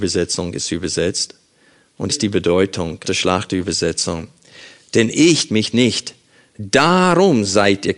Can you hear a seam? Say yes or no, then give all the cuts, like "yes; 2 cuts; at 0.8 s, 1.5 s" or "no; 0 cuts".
yes; 3 cuts; at 2.1 s, 3.0 s, 5.5 s